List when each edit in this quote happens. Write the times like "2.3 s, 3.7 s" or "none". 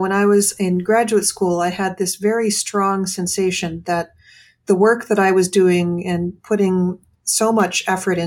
none